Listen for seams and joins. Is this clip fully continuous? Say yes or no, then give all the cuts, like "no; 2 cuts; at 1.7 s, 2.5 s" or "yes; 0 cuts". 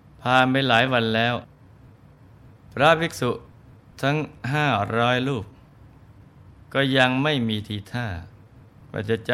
yes; 0 cuts